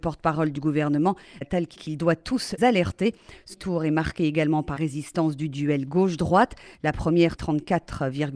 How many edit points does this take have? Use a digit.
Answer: 6